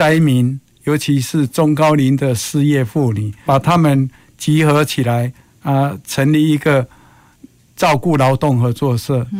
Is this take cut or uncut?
cut